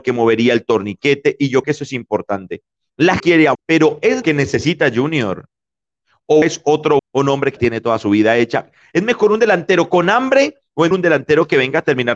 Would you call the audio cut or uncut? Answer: cut